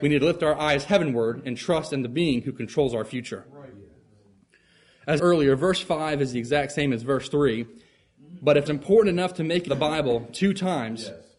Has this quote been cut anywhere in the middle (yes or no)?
yes